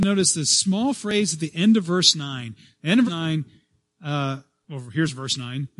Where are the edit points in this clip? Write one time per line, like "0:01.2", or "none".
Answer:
0:03.1